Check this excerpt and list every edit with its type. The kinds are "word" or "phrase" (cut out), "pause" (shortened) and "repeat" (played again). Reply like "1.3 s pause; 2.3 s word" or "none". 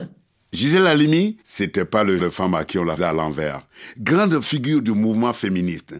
1.4 s pause; 2.2 s word; 3.0 s word